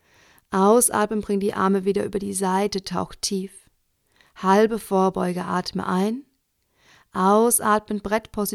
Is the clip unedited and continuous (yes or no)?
yes